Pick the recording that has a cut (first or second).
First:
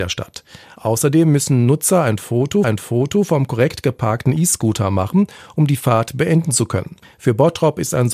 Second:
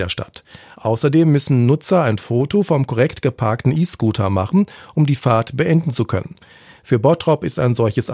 first